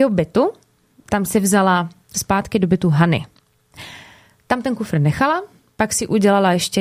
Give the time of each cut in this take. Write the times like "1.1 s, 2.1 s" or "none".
2.1 s